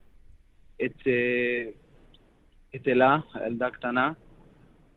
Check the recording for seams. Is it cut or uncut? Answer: uncut